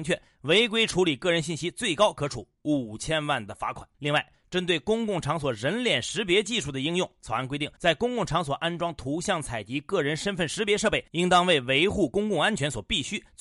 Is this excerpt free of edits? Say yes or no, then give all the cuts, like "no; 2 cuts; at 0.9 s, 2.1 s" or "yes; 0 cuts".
no; 2 cuts; at 3.9 s, 7.8 s